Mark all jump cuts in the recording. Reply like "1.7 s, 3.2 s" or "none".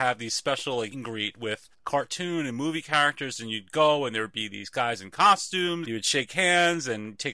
0.9 s, 1.7 s, 5.8 s